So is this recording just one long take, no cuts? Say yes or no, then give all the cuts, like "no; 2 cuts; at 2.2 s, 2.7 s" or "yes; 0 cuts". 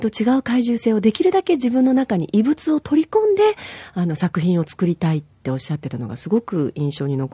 yes; 0 cuts